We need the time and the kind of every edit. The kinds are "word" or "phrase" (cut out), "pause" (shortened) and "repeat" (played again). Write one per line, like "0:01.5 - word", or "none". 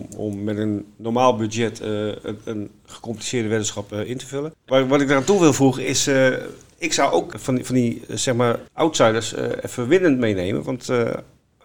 0:08.7 - pause